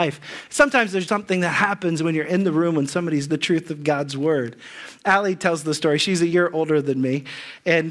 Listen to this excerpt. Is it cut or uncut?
cut